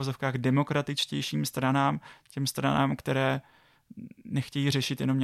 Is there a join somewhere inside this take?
yes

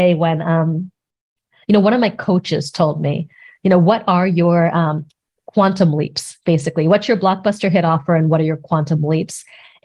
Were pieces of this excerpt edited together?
no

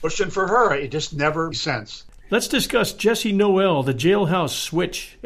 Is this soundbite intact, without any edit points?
no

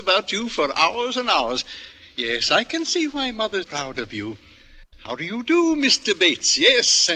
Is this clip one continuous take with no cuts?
no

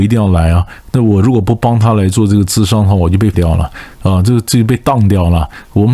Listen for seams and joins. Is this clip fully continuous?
no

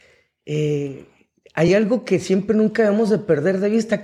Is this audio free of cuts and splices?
yes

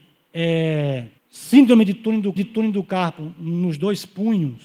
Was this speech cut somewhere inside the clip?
yes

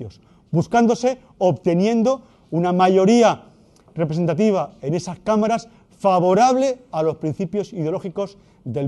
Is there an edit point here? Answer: no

